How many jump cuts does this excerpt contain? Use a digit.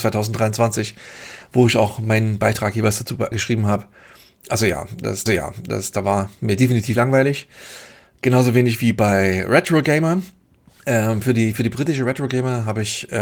3